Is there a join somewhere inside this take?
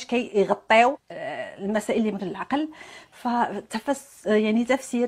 yes; 2 cuts; at 0.9 s, 2.2 s

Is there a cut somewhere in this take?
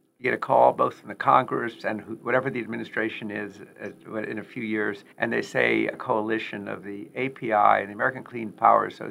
yes; 2 cuts; at 5.1 s, 5.9 s

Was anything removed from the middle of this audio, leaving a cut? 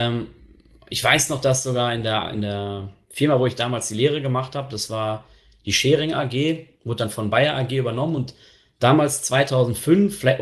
no; 0 cuts

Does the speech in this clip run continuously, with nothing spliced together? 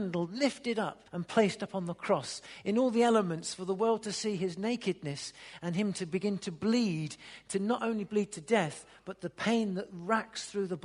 no; 1 cut; at 1.1 s

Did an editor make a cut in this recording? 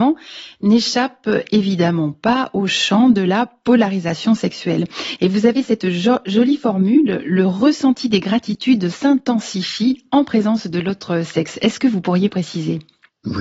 no; 0 cuts

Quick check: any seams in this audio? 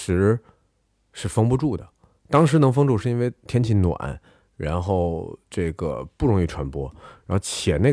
no; 0 cuts

